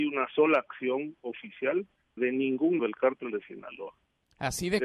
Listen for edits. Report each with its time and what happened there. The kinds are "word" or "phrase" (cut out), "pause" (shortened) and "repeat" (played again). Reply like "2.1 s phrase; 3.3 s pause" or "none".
2.2 s phrase; 2.8 s word